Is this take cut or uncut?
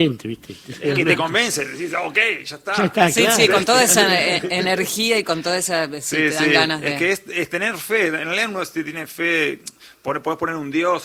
uncut